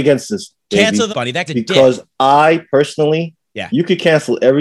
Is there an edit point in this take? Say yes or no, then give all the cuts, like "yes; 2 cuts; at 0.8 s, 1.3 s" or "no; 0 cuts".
yes; 2 cuts; at 1.1 s, 1.5 s